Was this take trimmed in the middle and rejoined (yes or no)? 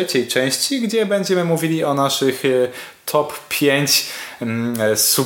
no